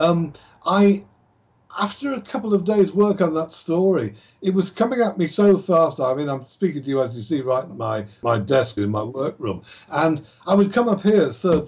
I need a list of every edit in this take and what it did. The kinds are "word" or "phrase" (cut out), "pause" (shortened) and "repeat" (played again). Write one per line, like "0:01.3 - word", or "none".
0:07.7 - word
0:08.8 - word